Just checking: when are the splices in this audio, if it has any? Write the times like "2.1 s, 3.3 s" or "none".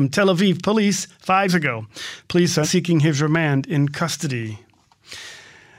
1.5 s, 2.6 s